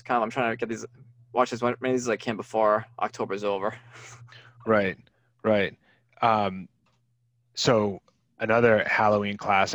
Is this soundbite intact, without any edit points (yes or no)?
yes